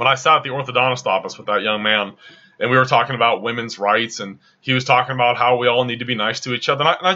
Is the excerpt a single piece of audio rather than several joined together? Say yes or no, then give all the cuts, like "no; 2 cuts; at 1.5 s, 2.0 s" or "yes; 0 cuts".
yes; 0 cuts